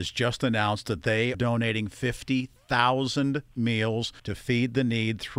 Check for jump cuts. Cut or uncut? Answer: cut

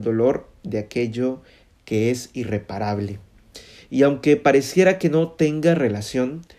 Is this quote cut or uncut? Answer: uncut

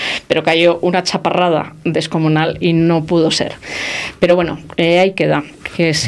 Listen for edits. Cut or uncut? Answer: uncut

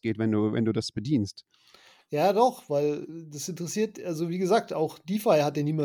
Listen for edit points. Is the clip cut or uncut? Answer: uncut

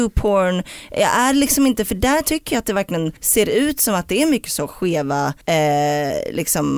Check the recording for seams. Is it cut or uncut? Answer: cut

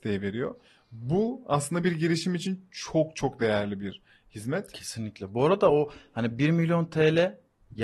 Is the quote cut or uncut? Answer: uncut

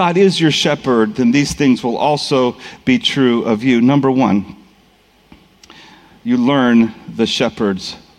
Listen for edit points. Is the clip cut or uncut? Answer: uncut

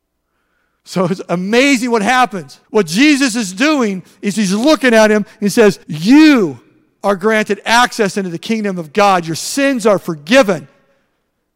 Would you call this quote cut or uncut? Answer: cut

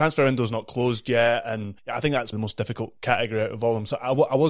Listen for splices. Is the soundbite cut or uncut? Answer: cut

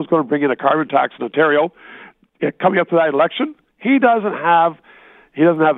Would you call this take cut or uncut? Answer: uncut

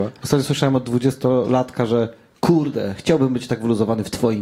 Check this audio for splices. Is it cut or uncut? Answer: uncut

